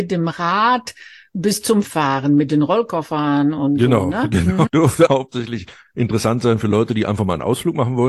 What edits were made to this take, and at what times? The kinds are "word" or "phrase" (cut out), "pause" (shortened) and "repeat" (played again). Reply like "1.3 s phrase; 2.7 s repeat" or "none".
1.8 s word; 4.7 s word; 5.1 s word